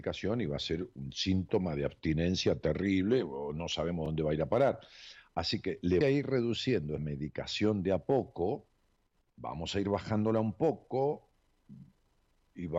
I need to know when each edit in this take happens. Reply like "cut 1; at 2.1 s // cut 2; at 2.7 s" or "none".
cut 1; at 6.0 s // cut 2; at 7.0 s // cut 3; at 9.0 s

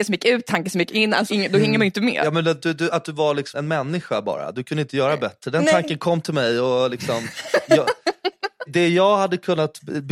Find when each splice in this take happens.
cut 1; at 1.3 s // cut 2; at 3.5 s // cut 3; at 8.7 s

